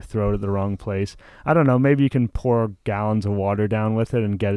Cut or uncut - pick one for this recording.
uncut